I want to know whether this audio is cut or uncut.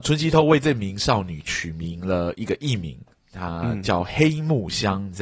uncut